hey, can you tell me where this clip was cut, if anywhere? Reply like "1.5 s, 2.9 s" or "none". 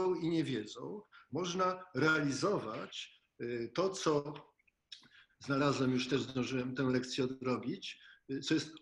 none